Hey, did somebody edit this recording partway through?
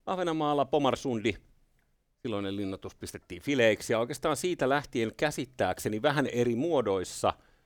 no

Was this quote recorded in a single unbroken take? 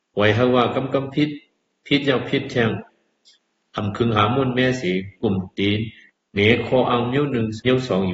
yes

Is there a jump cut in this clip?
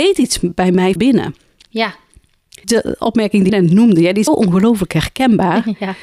yes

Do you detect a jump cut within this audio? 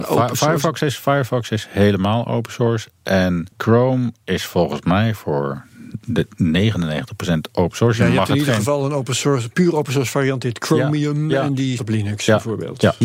yes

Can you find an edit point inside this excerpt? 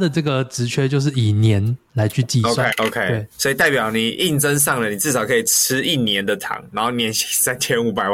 yes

